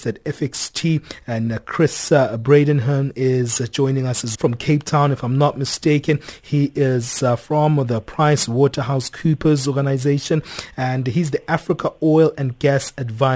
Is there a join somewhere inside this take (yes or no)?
yes